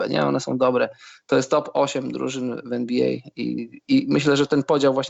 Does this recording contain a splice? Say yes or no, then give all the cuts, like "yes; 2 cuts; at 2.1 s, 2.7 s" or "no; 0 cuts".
no; 0 cuts